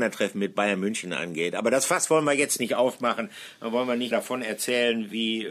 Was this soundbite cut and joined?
yes; 1 cut; at 4.1 s

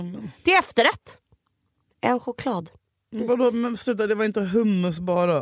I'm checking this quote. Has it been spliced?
no; 0 cuts

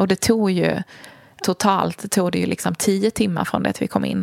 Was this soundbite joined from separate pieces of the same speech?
yes; 1 cut; at 1.4 s

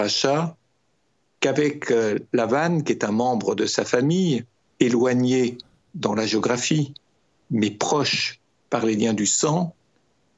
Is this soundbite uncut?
yes; 0 cuts

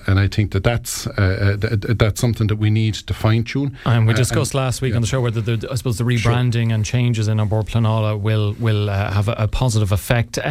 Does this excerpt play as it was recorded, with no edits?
yes; 0 cuts

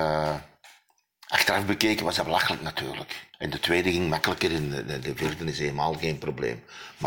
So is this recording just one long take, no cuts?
no; 1 cut; at 3.3 s

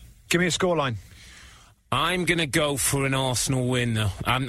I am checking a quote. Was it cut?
no; 0 cuts

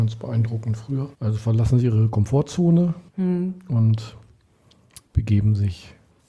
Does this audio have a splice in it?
yes; 3 cuts; at 1.1 s, 3.1 s, 5.1 s

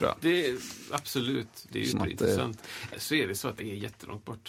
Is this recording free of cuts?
no; 3 cuts; at 1.9 s, 2.9 s, 3.6 s

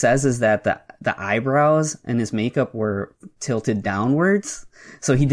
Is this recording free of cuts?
yes; 0 cuts

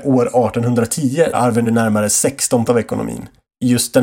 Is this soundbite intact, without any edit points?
no; 3 cuts; at 1.3 s, 1.6 s, 2.7 s

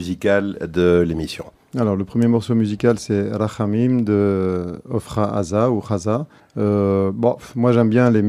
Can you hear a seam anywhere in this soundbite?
yes; 2 cuts; at 1.5 s, 6.4 s

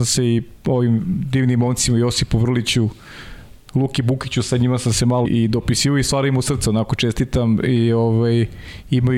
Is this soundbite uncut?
no; 1 cut; at 5.2 s

